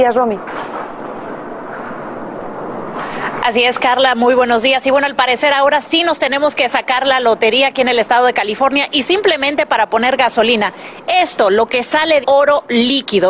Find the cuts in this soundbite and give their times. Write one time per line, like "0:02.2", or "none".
0:12.2

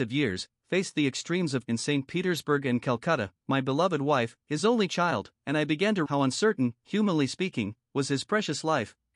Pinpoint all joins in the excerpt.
0:01.6
0:06.1

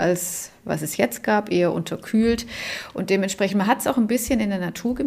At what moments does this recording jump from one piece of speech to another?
none

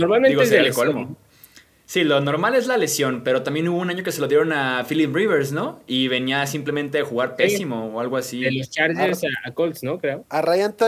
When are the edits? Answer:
none

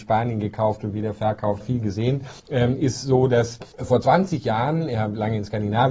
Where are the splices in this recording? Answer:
0:01.6
0:02.4
0:03.7

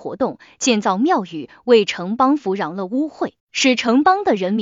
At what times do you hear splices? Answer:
0:03.4

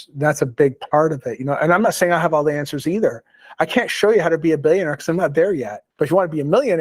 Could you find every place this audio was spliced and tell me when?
0:05.9

